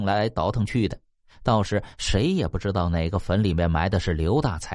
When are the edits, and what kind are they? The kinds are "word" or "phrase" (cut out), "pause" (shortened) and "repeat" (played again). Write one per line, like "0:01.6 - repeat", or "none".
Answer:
none